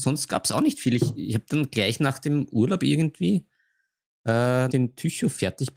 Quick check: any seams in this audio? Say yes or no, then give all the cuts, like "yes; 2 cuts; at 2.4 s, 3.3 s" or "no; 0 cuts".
yes; 1 cut; at 4.7 s